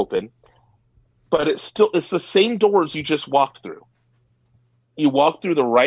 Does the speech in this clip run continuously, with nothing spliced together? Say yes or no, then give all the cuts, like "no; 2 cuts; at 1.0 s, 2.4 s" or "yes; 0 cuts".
yes; 0 cuts